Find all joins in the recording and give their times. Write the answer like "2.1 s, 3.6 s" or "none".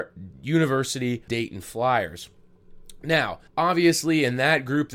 1.3 s, 3.5 s